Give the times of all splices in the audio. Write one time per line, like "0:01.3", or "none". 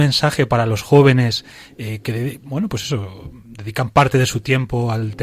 none